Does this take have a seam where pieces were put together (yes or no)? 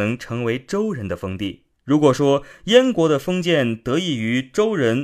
yes